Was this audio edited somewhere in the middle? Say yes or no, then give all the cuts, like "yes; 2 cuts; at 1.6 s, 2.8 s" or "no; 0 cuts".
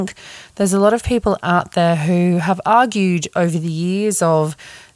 no; 0 cuts